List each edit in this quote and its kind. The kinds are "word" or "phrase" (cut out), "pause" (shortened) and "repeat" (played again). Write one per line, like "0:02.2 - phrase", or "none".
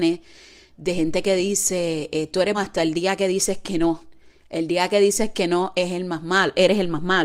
0:02.5 - word